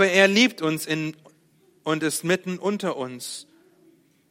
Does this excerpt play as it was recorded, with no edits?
yes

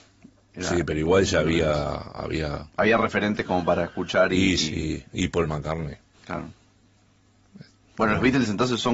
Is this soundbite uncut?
no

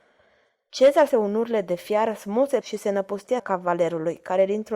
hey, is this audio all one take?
no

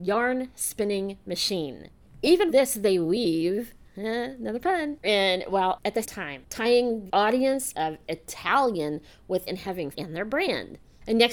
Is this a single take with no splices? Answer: no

